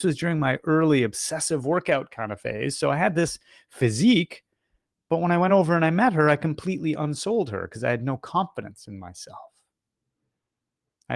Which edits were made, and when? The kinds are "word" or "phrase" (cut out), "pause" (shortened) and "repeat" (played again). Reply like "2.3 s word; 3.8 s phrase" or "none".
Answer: none